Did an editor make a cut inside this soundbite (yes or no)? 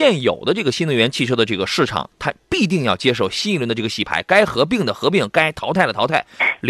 yes